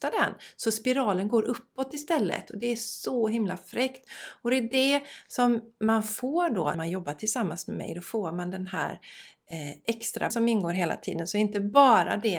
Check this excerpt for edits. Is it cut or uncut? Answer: cut